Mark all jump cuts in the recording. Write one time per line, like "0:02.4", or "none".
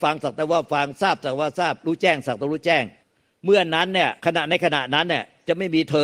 0:03.0
0:04.2

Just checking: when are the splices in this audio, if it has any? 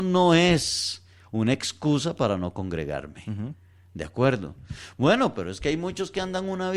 none

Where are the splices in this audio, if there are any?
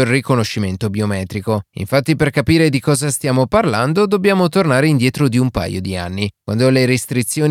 none

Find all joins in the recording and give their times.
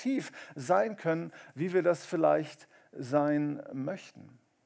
none

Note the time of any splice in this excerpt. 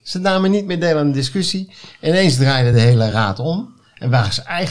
none

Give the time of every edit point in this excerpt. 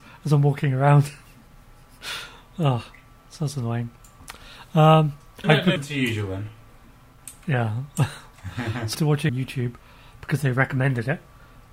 0:05.4
0:05.8
0:08.9
0:09.3

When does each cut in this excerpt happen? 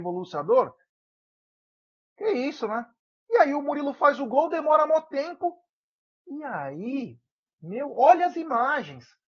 none

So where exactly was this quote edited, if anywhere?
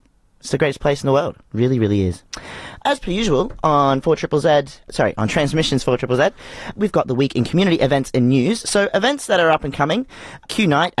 0:01.4

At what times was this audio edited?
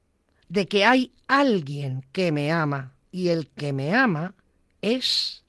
0:03.0

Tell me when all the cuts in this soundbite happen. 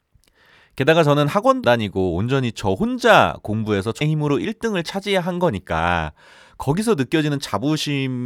0:01.6
0:04.0

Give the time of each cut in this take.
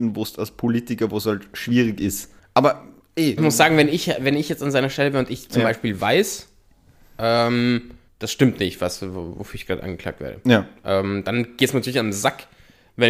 0:02.4
0:03.4
0:08.1

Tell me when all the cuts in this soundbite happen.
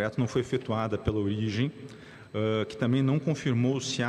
none

